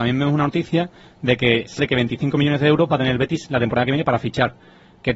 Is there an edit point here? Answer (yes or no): yes